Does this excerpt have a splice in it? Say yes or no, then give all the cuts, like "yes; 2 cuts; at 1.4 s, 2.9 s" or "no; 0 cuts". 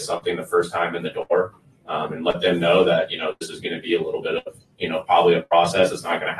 no; 0 cuts